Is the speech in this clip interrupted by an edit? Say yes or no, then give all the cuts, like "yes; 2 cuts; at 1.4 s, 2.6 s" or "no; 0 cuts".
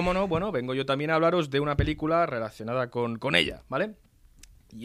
no; 0 cuts